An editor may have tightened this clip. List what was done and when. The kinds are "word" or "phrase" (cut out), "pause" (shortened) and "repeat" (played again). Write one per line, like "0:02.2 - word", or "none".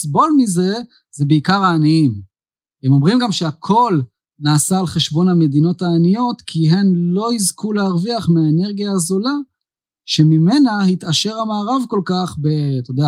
none